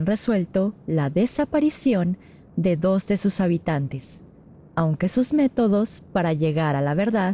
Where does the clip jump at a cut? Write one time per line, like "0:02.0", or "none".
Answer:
none